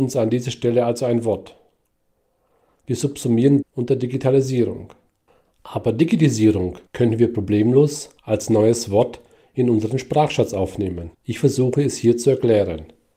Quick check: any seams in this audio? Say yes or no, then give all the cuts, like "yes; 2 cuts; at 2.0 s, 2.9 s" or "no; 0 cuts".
yes; 4 cuts; at 3.6 s, 6.9 s, 8.2 s, 11.1 s